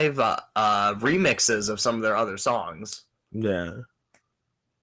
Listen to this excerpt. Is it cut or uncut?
uncut